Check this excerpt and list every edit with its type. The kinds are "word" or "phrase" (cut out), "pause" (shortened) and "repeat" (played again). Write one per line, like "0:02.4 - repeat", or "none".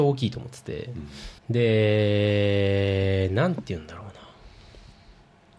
0:01.4 - pause